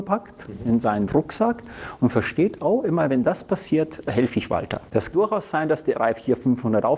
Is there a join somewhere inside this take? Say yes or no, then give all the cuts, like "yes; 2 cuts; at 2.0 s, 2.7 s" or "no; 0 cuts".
yes; 2 cuts; at 5.1 s, 5.9 s